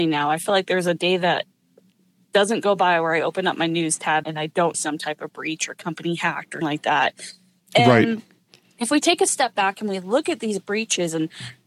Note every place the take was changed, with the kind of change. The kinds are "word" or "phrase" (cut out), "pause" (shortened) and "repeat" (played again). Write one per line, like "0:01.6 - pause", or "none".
0:04.2 - word
0:04.7 - word
0:06.6 - word